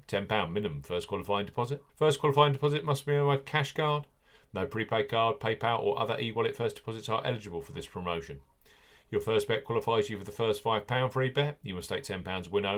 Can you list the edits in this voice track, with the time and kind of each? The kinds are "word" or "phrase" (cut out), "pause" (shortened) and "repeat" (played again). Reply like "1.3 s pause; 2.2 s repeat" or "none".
1.9 s pause